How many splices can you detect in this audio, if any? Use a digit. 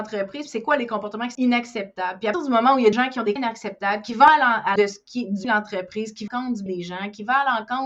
8